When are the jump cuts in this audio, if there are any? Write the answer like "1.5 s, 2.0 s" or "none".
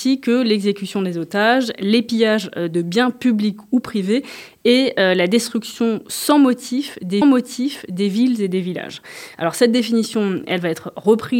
7.2 s

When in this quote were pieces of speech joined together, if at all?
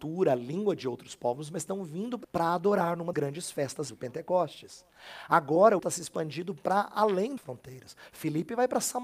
2.2 s, 3.1 s, 3.9 s, 5.8 s, 7.4 s

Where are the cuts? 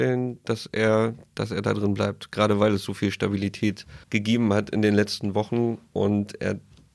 4.0 s

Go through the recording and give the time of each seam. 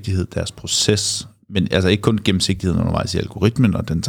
none

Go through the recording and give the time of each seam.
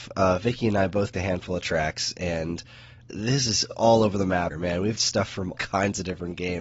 1.1 s, 3.1 s, 3.7 s, 4.5 s, 5.0 s, 5.5 s

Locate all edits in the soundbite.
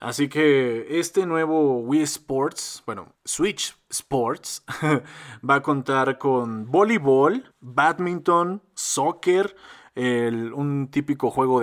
3.1 s, 7.5 s

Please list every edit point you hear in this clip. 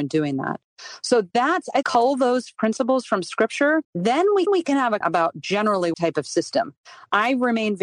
1.8 s, 2.6 s, 3.8 s, 4.5 s, 5.0 s, 5.9 s

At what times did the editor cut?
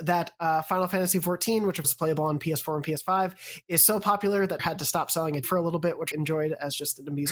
1.8 s, 4.6 s, 5.4 s, 6.1 s

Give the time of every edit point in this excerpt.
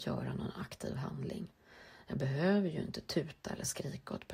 none

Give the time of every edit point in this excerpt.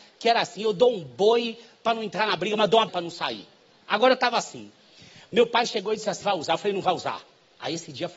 2.9 s, 6.2 s

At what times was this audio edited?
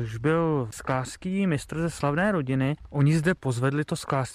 none

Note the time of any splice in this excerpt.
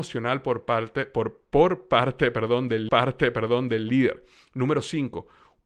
2.9 s

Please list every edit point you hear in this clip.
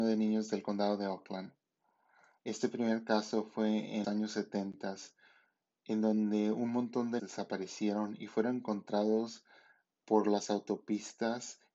4.0 s, 7.2 s, 10.0 s

